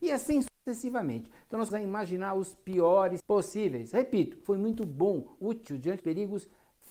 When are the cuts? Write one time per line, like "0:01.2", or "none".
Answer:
0:01.7
0:03.2
0:04.4
0:05.4
0:06.0